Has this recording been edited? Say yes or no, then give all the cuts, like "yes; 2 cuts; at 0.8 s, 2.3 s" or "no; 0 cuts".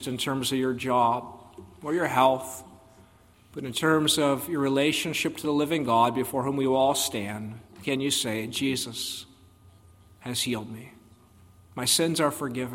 no; 0 cuts